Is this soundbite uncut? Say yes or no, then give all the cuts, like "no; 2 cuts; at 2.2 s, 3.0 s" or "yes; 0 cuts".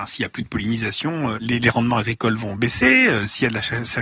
yes; 0 cuts